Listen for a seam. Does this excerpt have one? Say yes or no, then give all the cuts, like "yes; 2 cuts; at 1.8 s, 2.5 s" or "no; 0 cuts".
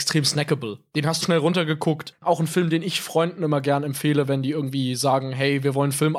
yes; 1 cut; at 1.2 s